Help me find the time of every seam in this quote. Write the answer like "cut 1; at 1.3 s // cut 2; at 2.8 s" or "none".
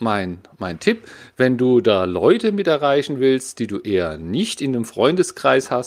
none